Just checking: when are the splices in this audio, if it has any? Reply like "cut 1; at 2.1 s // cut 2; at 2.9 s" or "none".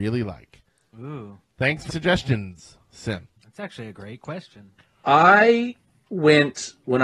cut 1; at 1.9 s // cut 2; at 3.4 s // cut 3; at 4.8 s